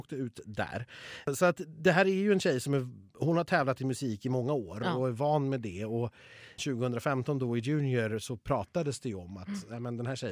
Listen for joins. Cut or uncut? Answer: cut